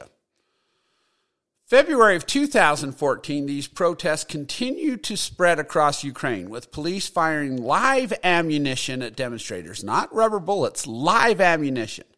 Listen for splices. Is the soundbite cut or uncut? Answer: uncut